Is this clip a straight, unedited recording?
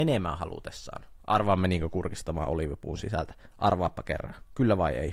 yes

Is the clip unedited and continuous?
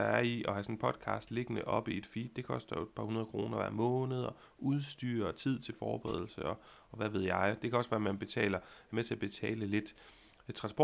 yes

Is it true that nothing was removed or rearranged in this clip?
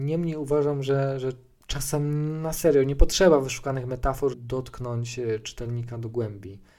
no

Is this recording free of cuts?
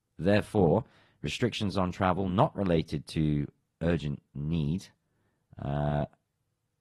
yes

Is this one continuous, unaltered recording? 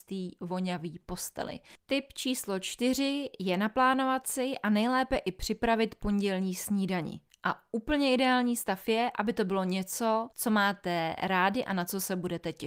no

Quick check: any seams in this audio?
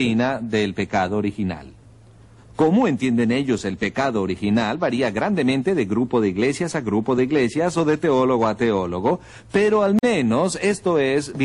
no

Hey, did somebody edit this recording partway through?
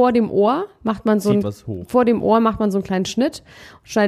yes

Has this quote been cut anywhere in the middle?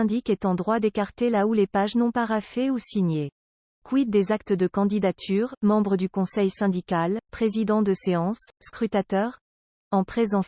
no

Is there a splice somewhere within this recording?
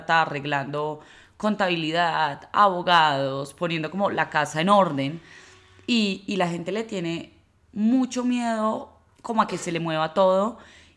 no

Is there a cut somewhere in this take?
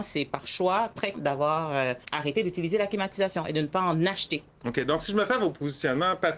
yes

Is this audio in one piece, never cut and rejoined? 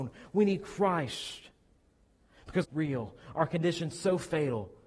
no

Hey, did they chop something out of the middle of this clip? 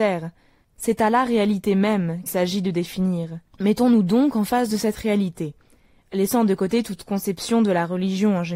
yes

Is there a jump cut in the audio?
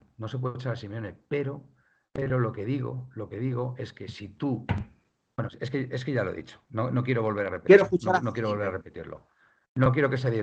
no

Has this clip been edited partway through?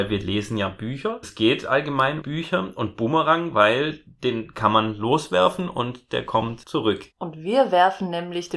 yes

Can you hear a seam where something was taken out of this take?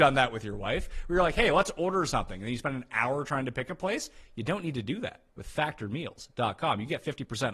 yes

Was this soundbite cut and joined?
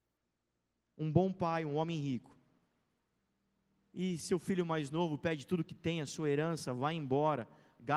no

